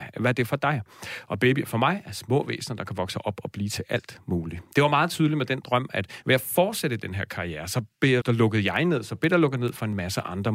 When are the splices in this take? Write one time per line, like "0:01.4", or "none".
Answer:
0:08.2